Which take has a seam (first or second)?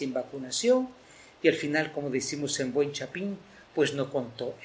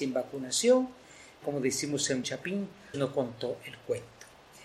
second